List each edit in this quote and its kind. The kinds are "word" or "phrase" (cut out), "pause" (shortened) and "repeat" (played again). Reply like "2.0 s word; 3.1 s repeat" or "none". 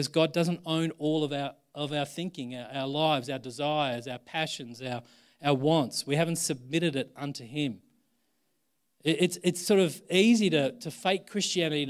none